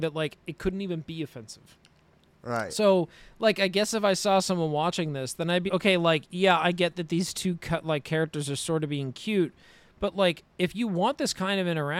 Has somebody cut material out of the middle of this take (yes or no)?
yes